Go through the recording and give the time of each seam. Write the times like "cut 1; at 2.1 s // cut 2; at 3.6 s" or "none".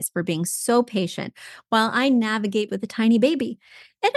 cut 1; at 2.7 s